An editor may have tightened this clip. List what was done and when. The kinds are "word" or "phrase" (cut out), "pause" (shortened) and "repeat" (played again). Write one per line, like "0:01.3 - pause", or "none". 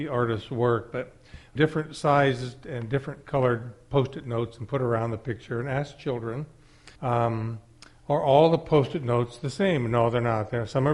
0:01.6 - phrase
0:07.0 - pause